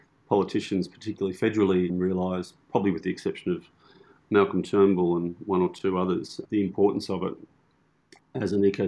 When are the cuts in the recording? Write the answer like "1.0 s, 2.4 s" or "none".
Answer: none